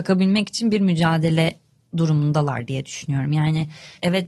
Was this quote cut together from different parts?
no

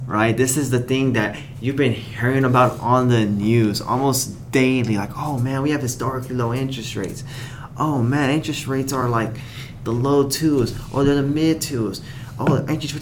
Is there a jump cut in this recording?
no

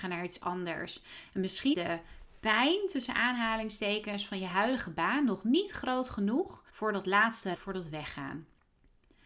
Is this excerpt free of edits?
no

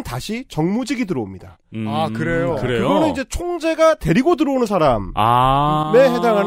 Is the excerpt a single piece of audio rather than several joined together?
yes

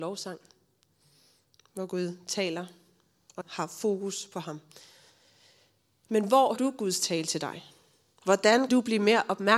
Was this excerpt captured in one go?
no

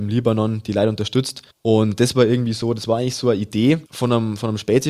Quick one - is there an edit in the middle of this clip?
yes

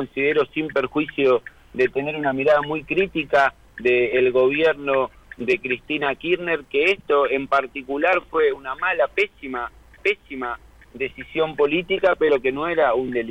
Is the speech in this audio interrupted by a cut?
yes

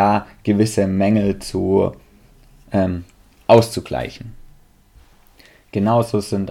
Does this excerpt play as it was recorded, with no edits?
yes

